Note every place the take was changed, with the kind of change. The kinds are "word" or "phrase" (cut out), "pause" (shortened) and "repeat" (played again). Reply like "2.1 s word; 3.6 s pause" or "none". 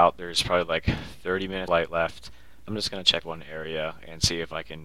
1.7 s word; 2.7 s word; 3.2 s word